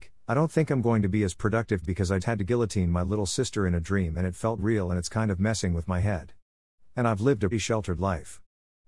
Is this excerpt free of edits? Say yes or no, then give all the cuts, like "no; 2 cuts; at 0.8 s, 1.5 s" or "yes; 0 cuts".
no; 4 cuts; at 1.8 s, 2.2 s, 4.6 s, 7.5 s